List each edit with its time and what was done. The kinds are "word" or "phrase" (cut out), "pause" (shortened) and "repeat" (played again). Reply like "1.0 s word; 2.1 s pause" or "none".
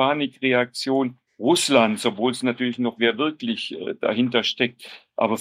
1.3 s pause; 3.0 s phrase